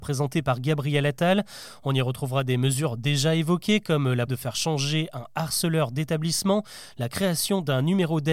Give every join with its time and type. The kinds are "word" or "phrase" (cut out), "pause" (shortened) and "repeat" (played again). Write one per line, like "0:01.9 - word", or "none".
0:04.3 - word

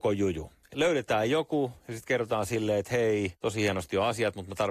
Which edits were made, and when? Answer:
none

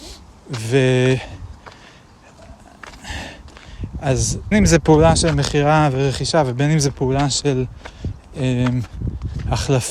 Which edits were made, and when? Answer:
0:04.5 - word

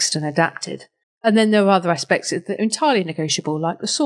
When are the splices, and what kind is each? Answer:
0:01.0 - pause

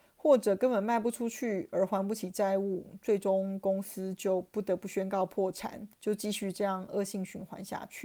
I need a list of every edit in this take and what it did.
0:05.9 - pause

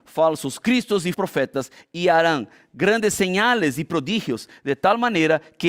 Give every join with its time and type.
0:01.1 - word

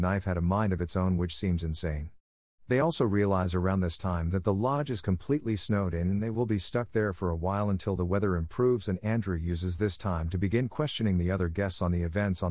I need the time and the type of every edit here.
none

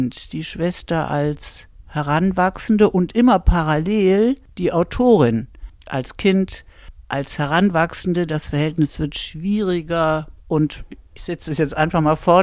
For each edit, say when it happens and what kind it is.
0:10.4 - pause

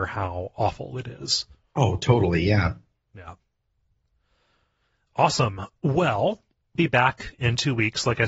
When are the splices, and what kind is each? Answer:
0:06.8 - word

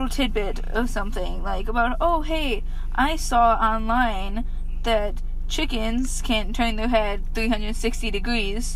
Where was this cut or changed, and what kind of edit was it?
none

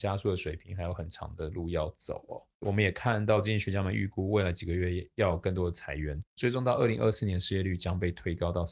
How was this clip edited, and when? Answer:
0:02.5 - pause
0:06.3 - pause

